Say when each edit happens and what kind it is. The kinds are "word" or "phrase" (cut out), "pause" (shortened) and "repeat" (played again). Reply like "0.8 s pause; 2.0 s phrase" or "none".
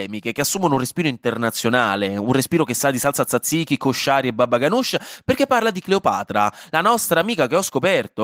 none